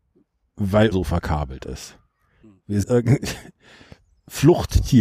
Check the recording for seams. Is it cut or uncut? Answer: cut